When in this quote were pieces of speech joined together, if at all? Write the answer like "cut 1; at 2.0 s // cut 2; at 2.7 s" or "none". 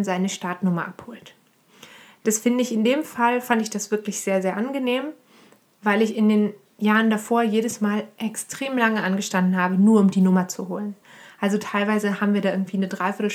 none